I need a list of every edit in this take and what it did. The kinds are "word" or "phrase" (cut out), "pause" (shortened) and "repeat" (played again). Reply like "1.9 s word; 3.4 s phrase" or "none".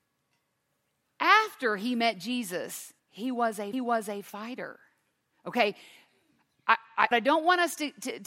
3.0 s pause; 3.7 s repeat; 7.1 s word